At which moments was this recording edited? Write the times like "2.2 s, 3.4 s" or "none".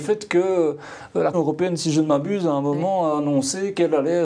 1.3 s